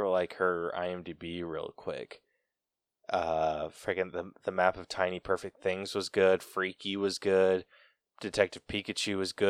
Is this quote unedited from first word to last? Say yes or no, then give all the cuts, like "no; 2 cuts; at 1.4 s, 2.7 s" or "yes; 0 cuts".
yes; 0 cuts